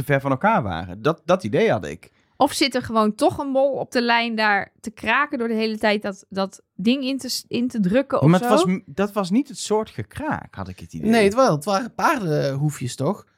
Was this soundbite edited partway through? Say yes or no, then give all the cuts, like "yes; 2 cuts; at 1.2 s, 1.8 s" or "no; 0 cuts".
no; 0 cuts